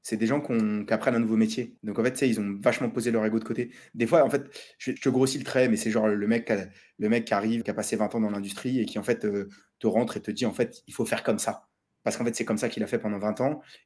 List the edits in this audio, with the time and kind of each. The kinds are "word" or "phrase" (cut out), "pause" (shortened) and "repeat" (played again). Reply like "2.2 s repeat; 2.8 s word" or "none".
1.8 s pause; 5.0 s word; 7.6 s word